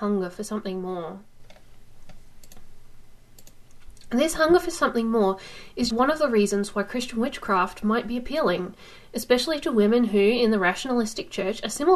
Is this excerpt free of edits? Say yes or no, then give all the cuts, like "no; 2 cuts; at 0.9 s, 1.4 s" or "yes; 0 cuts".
no; 1 cut; at 5.9 s